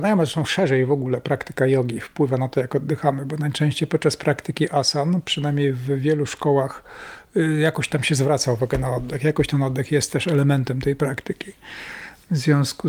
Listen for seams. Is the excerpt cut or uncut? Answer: uncut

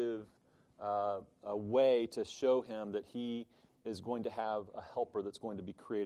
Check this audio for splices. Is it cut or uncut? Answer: cut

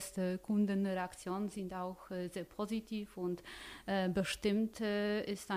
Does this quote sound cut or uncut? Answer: uncut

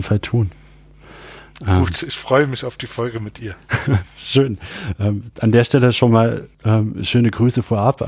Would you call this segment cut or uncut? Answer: uncut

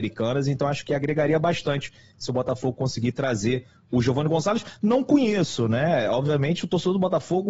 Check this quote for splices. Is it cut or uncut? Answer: uncut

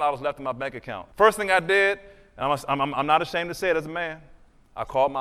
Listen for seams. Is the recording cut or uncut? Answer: cut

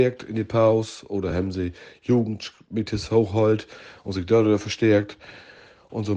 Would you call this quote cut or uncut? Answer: uncut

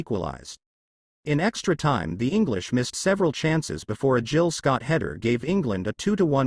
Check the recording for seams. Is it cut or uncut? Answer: uncut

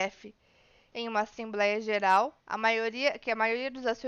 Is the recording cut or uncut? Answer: cut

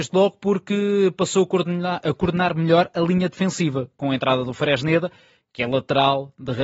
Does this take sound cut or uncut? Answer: uncut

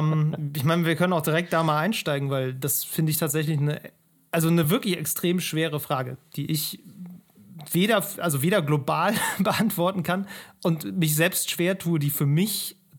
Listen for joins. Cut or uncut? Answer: uncut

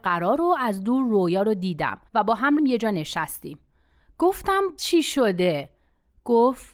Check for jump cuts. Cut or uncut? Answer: cut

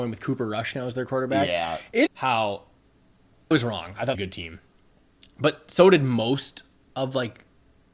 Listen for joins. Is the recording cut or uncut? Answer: cut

